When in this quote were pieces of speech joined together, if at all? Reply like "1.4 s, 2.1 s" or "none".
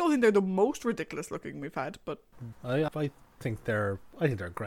2.5 s, 2.9 s

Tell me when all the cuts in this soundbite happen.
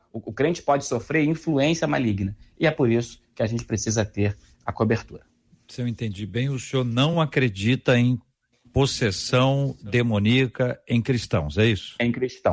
none

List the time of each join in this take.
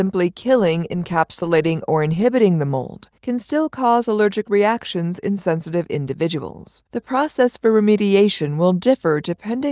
3.2 s, 6.9 s

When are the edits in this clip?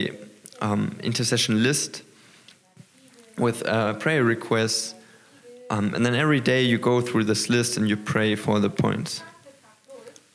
none

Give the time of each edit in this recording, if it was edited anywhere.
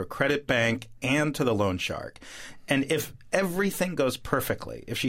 none

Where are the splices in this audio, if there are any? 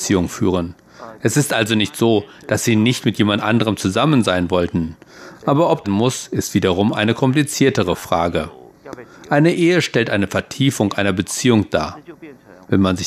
5.8 s

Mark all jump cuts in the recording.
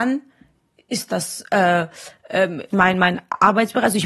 2.7 s

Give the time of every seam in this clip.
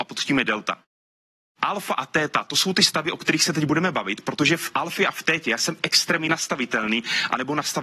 none

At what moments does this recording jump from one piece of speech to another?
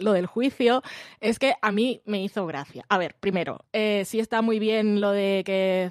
none

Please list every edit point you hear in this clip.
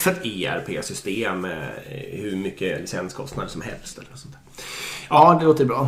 none

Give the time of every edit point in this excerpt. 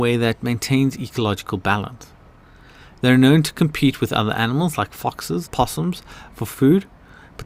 5.4 s

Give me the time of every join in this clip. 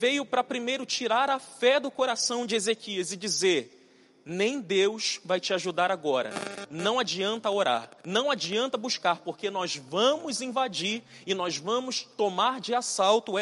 8.0 s

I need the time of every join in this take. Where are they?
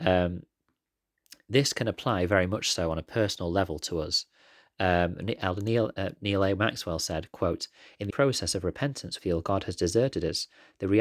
8.1 s, 9.2 s

